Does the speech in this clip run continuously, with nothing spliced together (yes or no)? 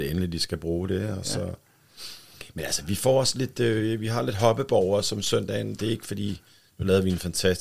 yes